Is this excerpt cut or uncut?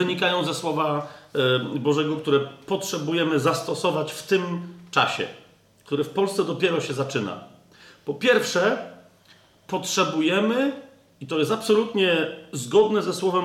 uncut